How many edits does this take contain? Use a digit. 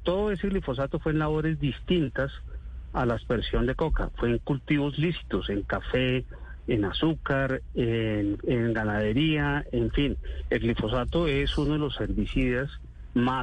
1